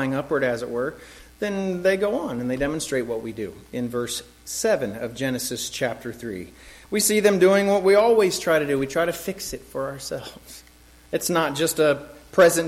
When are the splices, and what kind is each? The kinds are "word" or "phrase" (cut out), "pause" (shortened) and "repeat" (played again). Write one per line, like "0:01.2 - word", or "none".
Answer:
none